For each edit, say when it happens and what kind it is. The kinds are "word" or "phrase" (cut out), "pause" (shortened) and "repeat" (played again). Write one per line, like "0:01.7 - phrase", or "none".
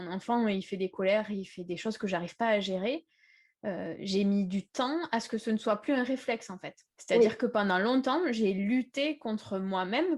0:06.9 - pause